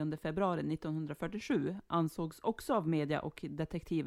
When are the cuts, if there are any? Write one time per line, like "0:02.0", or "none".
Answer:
none